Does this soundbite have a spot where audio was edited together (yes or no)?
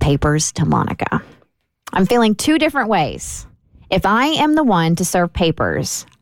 no